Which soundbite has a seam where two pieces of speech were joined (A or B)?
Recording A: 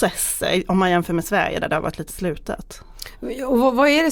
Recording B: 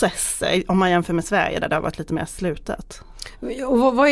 A